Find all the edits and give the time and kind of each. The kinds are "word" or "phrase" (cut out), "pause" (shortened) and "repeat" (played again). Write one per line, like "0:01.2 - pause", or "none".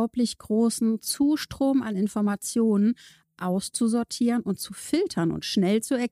none